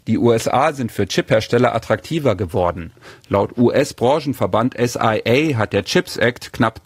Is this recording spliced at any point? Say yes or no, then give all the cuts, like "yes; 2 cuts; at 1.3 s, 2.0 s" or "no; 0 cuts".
no; 0 cuts